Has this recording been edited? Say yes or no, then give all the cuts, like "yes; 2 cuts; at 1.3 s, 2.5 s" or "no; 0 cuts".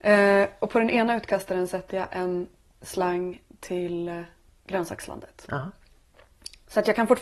no; 0 cuts